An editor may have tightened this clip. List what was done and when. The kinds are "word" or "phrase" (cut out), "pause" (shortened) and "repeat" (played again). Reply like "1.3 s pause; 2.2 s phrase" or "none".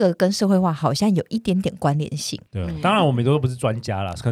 2.5 s pause